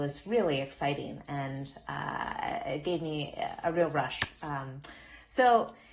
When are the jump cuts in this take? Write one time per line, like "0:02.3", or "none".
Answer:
none